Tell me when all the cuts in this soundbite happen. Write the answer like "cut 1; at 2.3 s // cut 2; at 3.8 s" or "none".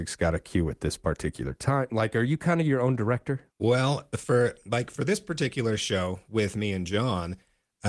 cut 1; at 3.5 s